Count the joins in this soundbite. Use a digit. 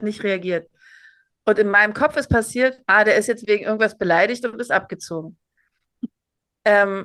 1